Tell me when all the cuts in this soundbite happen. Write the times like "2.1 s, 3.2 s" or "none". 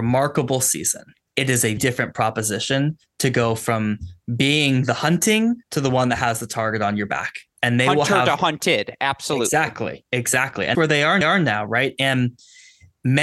1.1 s, 1.8 s, 5.6 s, 10.7 s, 11.2 s